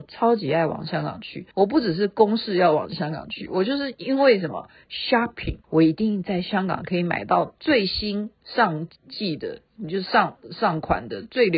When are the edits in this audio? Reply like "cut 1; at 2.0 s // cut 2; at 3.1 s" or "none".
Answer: cut 1; at 1.5 s // cut 2; at 5.6 s // cut 3; at 9.0 s